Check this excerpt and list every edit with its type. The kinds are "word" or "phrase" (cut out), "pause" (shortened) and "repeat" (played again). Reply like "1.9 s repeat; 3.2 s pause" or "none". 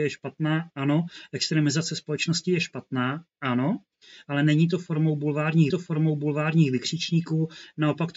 5.7 s repeat